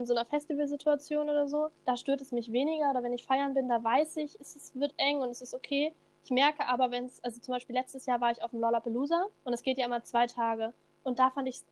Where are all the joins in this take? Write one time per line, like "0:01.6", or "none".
0:01.8
0:09.4